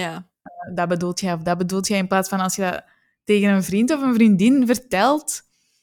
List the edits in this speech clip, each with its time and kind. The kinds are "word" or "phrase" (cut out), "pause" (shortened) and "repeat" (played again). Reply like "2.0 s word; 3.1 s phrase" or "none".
none